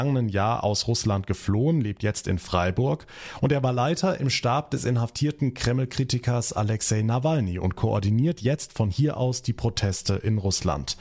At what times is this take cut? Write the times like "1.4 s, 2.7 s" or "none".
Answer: none